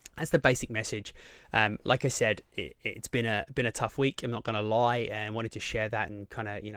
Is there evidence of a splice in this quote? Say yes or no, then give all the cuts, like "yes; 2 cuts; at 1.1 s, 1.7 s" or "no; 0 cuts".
no; 0 cuts